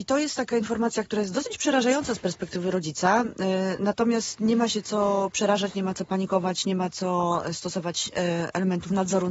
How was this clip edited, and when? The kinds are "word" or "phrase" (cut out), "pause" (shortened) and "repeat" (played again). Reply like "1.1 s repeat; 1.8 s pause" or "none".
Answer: none